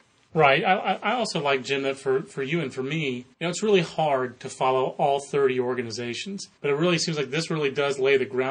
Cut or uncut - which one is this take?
cut